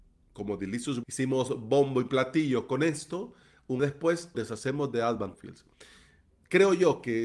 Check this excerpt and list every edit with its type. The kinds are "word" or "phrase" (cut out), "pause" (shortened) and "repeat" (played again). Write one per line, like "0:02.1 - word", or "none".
0:01.0 - word
0:03.8 - word
0:04.3 - word
0:05.3 - word